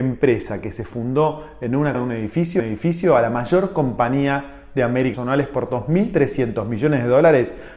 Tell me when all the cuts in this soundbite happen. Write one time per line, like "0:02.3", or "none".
0:01.9
0:02.6
0:05.1